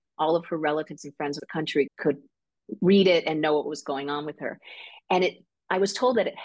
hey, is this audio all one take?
no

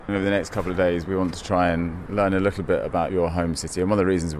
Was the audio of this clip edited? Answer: no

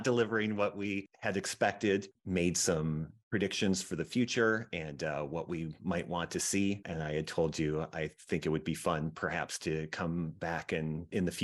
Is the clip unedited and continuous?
yes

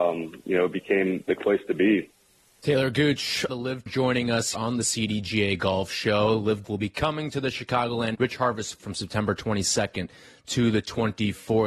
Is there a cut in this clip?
yes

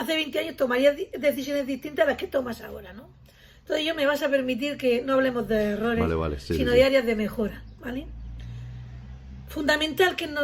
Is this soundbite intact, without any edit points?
yes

